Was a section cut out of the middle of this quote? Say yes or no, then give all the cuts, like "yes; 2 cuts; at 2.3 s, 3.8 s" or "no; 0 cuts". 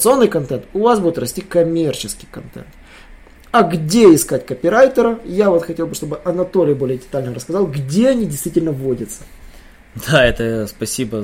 no; 0 cuts